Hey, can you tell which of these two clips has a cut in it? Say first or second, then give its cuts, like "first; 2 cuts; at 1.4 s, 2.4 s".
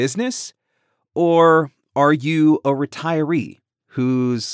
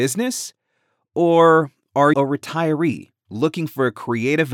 second; 2 cuts; at 2.1 s, 3.3 s